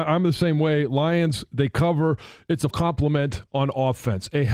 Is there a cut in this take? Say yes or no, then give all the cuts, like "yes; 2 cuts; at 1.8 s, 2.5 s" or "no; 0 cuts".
yes; 1 cut; at 2.7 s